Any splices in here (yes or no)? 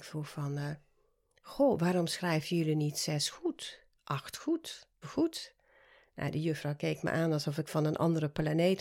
yes